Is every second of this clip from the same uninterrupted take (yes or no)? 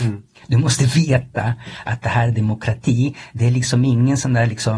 yes